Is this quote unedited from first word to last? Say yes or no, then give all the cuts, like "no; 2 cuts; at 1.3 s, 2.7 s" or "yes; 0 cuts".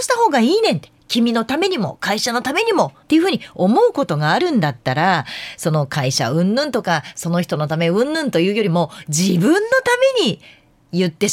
no; 1 cut; at 3.0 s